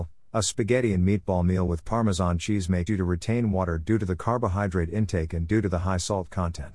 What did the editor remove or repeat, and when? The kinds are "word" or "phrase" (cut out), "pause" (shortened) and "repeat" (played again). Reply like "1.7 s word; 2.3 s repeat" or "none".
2.9 s word